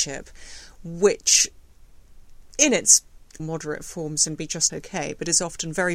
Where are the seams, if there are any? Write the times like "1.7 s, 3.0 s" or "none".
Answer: 3.4 s, 4.7 s